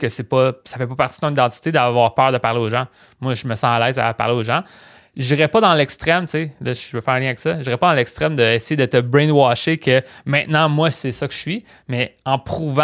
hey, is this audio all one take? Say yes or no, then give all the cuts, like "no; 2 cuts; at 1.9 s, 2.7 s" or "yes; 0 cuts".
yes; 0 cuts